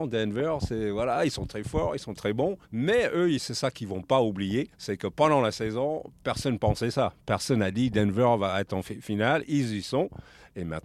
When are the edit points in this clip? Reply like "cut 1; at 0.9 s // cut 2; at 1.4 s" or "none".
cut 1; at 2.6 s // cut 2; at 3.4 s // cut 3; at 4.7 s